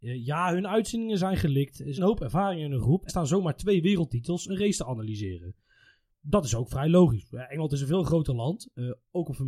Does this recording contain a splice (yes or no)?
yes